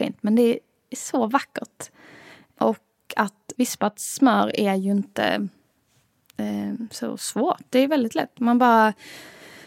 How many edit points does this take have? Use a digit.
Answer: 0